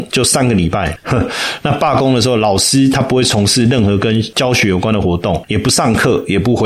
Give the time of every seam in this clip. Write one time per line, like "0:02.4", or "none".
none